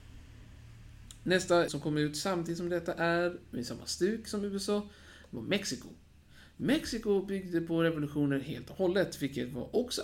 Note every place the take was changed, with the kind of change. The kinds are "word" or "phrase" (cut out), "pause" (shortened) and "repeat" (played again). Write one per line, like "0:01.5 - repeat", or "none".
0:01.7 - word